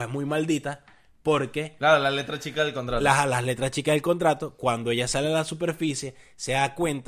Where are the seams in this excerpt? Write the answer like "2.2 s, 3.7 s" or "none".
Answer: none